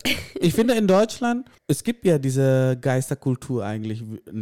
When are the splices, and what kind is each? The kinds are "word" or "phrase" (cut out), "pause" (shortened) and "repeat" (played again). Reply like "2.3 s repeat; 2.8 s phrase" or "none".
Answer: 1.6 s pause